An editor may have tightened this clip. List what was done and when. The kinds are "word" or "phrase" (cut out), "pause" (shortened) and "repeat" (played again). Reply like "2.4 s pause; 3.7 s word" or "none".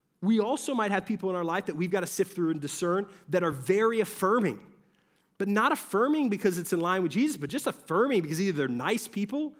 none

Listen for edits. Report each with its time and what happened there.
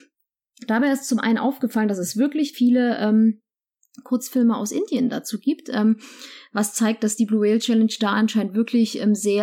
2.5 s word

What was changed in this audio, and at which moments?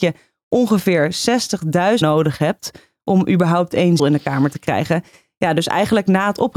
2.0 s word; 4.0 s word

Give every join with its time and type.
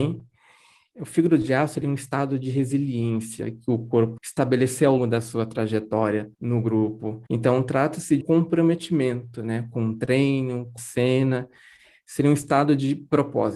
1.8 s word; 4.2 s word; 5.0 s word; 6.3 s pause; 7.3 s pause; 8.2 s word; 10.8 s word

